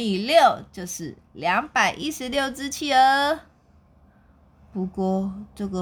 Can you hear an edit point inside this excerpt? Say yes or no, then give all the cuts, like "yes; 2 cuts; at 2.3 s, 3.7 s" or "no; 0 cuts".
no; 0 cuts